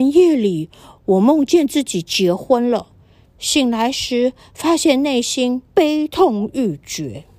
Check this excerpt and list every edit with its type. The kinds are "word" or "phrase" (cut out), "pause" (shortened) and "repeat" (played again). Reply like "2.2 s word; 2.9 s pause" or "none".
5.7 s pause